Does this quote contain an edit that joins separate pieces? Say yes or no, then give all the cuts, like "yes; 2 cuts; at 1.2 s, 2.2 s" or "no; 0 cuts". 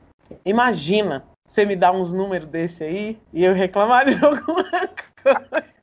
yes; 2 cuts; at 1.3 s, 3.2 s